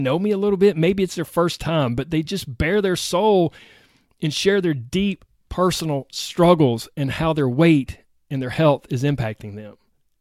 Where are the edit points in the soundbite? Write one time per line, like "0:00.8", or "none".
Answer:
none